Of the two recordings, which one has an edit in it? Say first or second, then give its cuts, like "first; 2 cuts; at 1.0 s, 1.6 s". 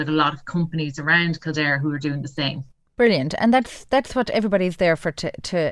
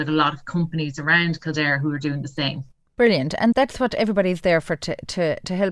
second; 1 cut; at 3.5 s